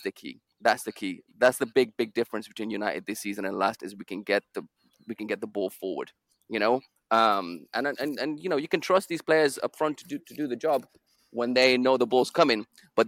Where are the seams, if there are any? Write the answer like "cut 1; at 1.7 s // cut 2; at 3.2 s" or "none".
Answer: none